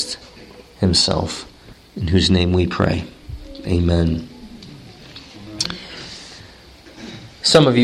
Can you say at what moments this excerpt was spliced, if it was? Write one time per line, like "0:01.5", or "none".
0:01.7